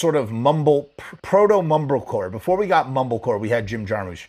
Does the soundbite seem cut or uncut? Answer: cut